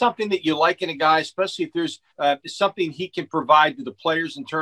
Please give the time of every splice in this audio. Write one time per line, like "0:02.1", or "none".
0:02.1